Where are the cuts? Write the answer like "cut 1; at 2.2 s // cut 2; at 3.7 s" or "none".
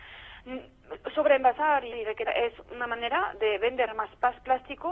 cut 1; at 1.9 s // cut 2; at 2.3 s